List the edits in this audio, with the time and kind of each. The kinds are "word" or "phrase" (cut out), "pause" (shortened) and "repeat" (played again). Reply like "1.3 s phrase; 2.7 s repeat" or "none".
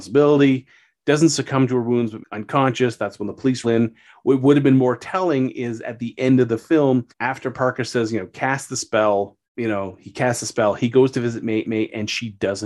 2.2 s word; 3.6 s word; 7.1 s pause; 9.4 s pause; 11.6 s repeat